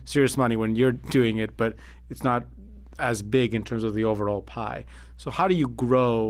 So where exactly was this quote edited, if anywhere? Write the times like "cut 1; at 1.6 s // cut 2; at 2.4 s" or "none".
none